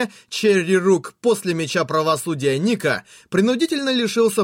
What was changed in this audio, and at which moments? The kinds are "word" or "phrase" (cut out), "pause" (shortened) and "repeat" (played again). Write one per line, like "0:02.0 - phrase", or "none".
none